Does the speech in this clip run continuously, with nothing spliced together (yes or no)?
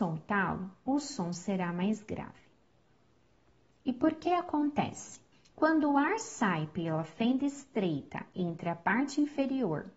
no